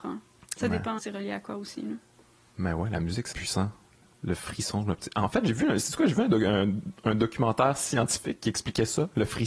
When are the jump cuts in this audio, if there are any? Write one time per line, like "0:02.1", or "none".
0:01.0
0:03.3